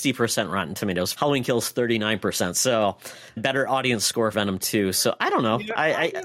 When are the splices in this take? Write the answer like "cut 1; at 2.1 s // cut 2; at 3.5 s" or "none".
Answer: cut 1; at 1.1 s // cut 2; at 3.4 s // cut 3; at 4.3 s

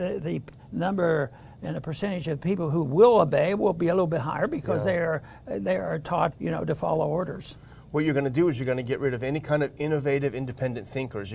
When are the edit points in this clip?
cut 1; at 6.3 s

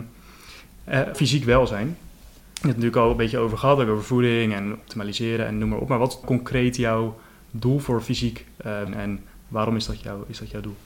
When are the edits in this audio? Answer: cut 1; at 1.1 s // cut 2; at 6.2 s // cut 3; at 8.9 s

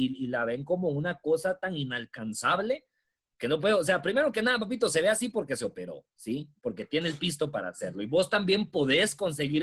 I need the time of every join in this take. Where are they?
none

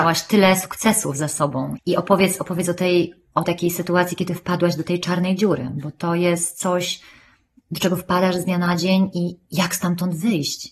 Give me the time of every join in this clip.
cut 1; at 1.8 s // cut 2; at 3.4 s

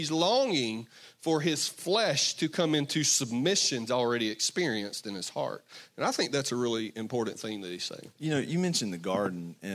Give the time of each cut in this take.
cut 1; at 3.9 s

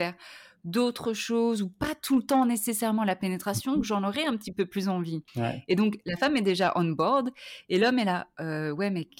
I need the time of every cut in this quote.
cut 1; at 5.3 s

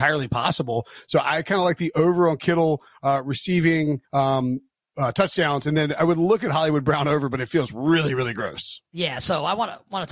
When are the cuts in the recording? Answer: cut 1; at 4.0 s // cut 2; at 8.9 s

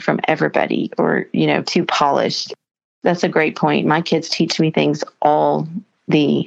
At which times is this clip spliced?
none

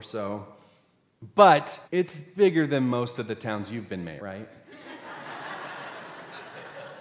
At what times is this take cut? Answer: cut 1; at 1.8 s // cut 2; at 4.2 s

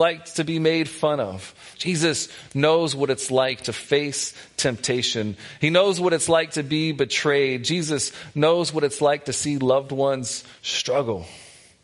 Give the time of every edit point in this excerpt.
cut 1; at 1.7 s

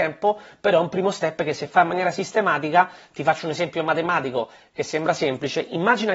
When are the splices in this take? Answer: none

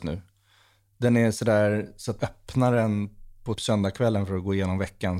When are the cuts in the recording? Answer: cut 1; at 2.2 s // cut 2; at 3.6 s

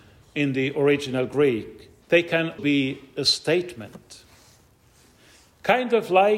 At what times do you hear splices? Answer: cut 1; at 2.0 s // cut 2; at 2.6 s

